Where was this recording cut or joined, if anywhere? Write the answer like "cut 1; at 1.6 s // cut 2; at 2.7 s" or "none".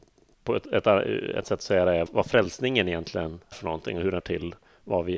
cut 1; at 1.4 s // cut 2; at 2.1 s // cut 3; at 3.5 s // cut 4; at 4.2 s